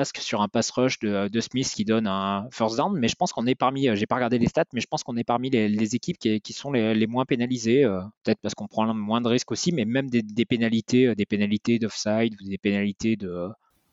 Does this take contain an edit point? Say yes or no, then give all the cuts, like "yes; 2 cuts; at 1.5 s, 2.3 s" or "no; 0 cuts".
yes; 1 cut; at 8.2 s